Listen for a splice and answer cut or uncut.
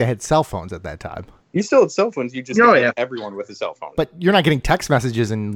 uncut